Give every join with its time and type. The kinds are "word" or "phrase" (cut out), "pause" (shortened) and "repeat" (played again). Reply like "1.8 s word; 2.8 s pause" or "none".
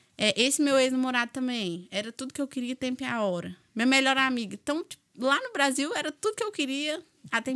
5.1 s pause